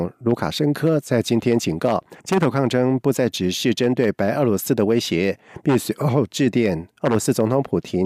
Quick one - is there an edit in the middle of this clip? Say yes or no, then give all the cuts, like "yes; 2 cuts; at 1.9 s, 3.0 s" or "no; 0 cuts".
yes; 1 cut; at 2.2 s